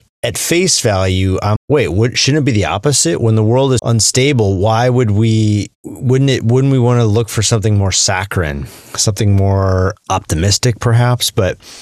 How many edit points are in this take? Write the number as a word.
three